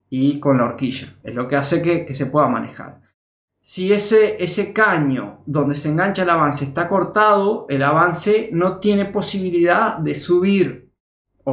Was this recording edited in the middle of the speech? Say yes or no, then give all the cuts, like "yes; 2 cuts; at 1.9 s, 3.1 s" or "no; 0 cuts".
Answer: no; 0 cuts